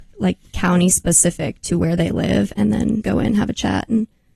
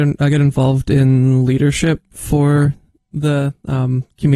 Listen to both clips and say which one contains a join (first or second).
first